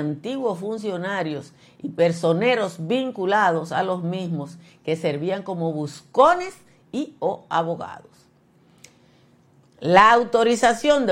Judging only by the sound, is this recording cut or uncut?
uncut